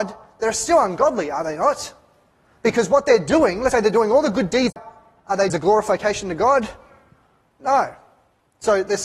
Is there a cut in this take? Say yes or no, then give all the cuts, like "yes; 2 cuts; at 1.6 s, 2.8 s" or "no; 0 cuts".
yes; 3 cuts; at 3.7 s, 4.7 s, 5.5 s